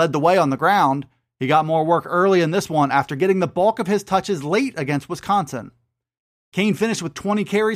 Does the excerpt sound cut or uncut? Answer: uncut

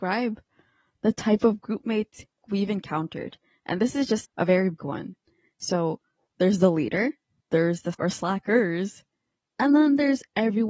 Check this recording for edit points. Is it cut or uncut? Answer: cut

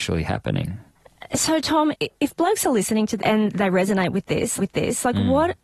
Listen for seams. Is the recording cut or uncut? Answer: cut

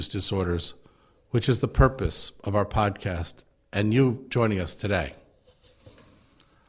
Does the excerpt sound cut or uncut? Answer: uncut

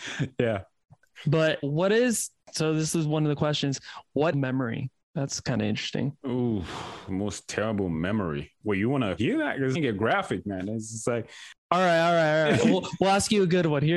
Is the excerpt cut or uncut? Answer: cut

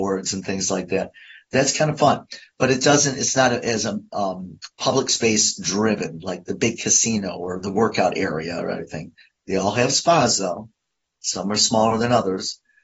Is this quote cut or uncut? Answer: uncut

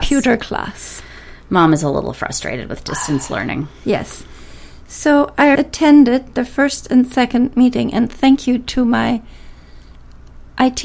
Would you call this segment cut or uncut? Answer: cut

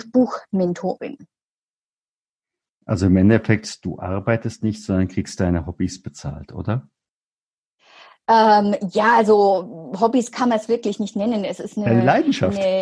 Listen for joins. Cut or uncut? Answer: uncut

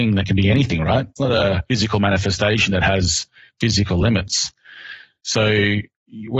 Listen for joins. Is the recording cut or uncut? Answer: uncut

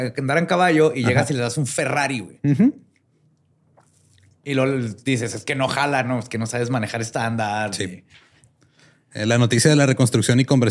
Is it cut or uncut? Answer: uncut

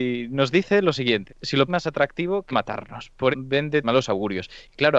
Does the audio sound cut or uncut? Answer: cut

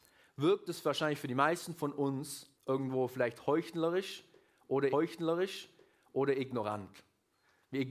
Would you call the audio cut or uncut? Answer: cut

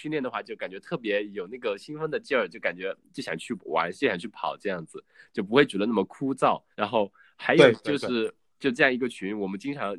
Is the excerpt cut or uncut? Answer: cut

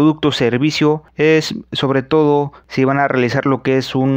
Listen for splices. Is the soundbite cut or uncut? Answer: uncut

